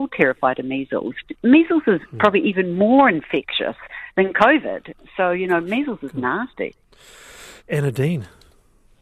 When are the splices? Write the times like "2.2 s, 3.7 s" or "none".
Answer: 7.6 s

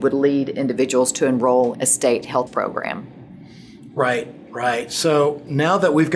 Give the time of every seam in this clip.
1.7 s, 2.5 s

